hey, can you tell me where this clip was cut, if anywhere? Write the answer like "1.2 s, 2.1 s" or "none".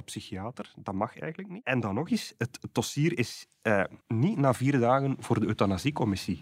4.0 s

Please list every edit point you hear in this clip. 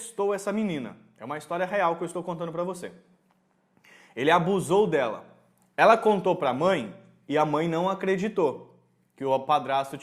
none

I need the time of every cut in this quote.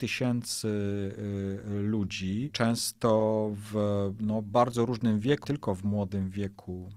5.4 s

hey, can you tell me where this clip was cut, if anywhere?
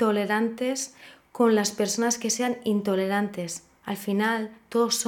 none

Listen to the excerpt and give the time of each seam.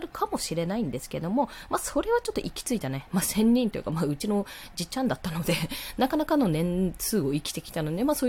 none

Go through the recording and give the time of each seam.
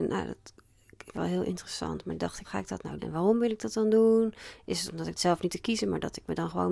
1.1 s, 2.4 s, 3.0 s, 5.2 s, 5.5 s

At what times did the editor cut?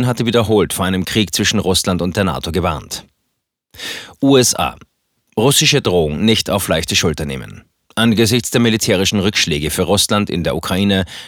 none

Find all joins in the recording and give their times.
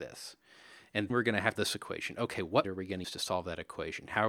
1.1 s, 1.5 s, 2.6 s, 3.0 s

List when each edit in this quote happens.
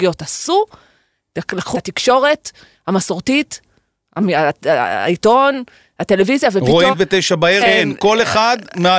1.7 s, 6.9 s, 7.6 s

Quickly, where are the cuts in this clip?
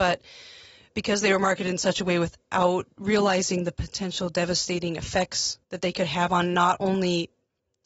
5.6 s

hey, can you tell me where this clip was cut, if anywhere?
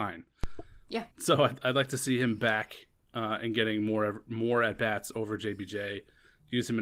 1.1 s

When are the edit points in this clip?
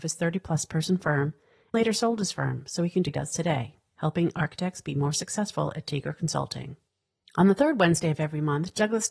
1.7 s, 3.1 s

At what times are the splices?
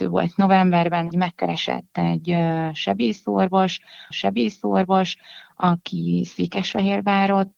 1.1 s, 4.1 s

